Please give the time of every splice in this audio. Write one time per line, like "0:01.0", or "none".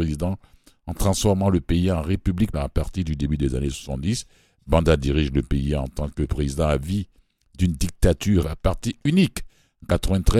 0:02.5
0:08.4